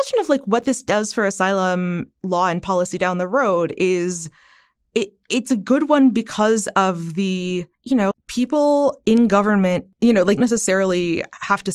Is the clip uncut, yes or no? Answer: no